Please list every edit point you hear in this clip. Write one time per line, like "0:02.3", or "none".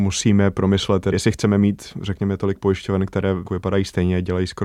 0:01.1
0:03.5